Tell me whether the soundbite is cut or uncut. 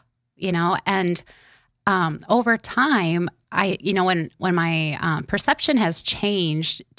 uncut